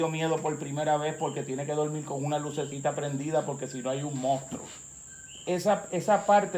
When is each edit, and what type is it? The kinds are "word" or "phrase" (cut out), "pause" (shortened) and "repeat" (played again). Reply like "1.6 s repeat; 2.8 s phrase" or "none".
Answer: none